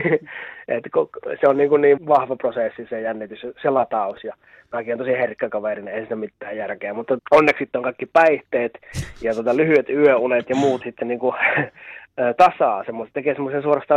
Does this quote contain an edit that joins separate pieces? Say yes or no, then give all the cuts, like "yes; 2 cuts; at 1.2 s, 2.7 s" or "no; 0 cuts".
yes; 3 cuts; at 2.0 s, 7.2 s, 10.8 s